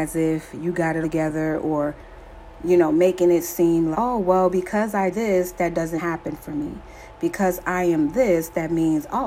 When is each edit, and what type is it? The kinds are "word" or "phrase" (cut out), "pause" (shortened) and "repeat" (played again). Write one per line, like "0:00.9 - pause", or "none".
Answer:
0:01.0 - word
0:03.9 - word
0:05.1 - word
0:06.0 - phrase

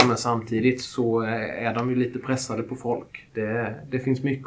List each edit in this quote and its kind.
0:03.3 - pause

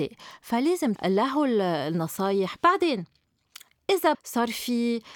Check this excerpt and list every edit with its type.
0:00.9 - word
0:02.6 - word
0:04.1 - word

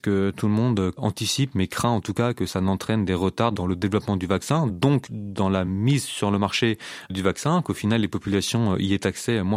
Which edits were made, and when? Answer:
none

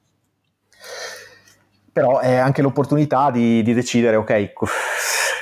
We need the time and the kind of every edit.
none

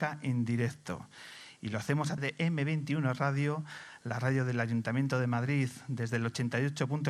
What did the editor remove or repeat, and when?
0:02.2 - phrase

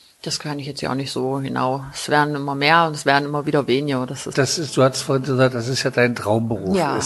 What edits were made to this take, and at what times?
0:04.3 - phrase

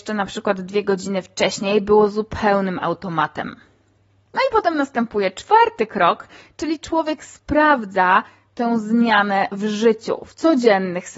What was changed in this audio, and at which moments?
none

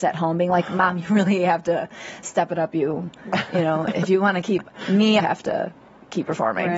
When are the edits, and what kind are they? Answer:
0:05.2 - phrase

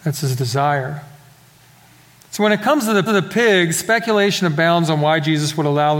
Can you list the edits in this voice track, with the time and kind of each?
0:03.1 - repeat

